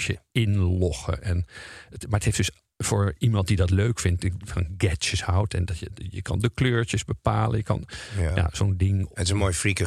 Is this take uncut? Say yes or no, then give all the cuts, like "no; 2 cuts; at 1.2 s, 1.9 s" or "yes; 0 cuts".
yes; 0 cuts